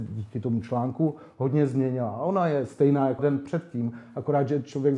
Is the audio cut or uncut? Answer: cut